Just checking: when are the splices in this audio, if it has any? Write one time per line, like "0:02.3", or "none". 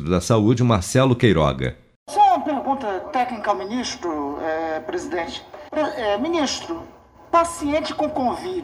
0:05.7